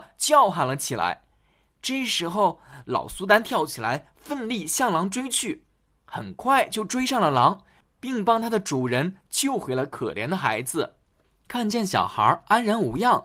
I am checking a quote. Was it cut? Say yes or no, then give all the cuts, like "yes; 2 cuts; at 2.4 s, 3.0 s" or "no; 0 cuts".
no; 0 cuts